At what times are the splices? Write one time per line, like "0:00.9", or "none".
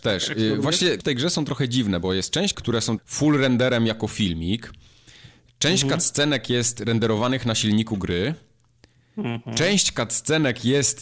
0:01.0
0:02.5
0:03.0

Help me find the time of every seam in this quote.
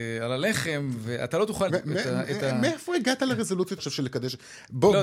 0:01.7
0:03.8

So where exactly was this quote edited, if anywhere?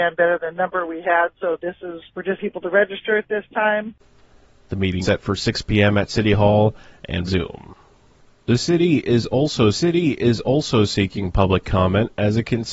0:02.1
0:02.4
0:05.0
0:07.3
0:09.7

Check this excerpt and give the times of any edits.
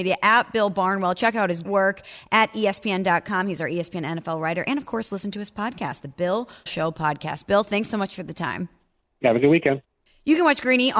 0:01.6
0:06.7

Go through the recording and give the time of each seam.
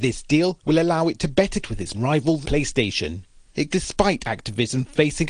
0:01.6
0:01.9
0:02.4
0:03.7

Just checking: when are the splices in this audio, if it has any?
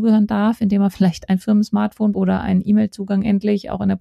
0:02.1

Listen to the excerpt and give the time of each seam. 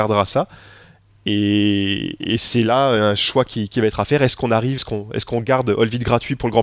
0:04.8

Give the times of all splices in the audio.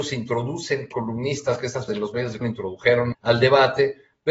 0:00.9
0:01.9
0:02.4
0:03.1

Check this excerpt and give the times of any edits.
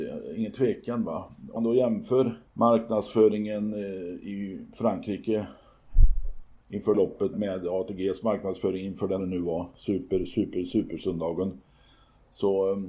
0:01.6
0:02.5
0:06.6
0:06.9
0:07.3
0:09.2
0:10.3

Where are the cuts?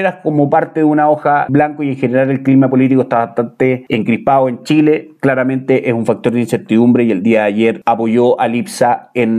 0:01.5

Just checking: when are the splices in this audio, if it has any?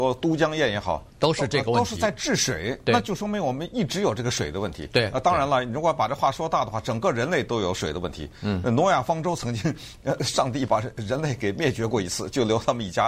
0:01.1

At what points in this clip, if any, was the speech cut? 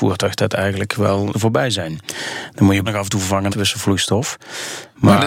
0:01.3
0:02.9
0:03.5

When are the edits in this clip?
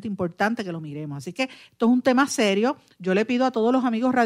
none

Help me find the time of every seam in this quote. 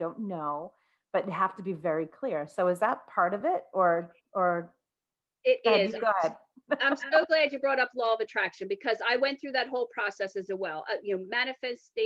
none

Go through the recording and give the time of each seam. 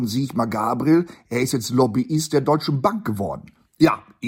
none

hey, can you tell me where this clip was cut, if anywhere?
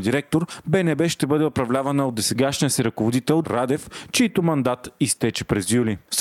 0:03.4

